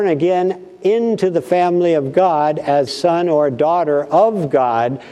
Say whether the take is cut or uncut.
cut